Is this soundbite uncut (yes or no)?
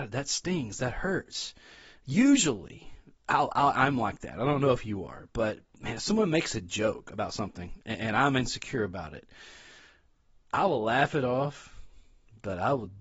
yes